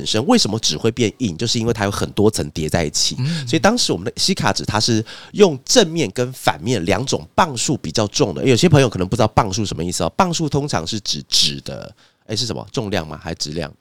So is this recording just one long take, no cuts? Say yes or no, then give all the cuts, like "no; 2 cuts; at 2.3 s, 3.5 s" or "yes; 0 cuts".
yes; 0 cuts